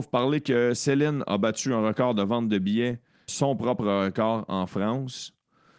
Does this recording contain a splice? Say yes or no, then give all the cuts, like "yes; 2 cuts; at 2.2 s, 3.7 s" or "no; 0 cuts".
yes; 1 cut; at 3.3 s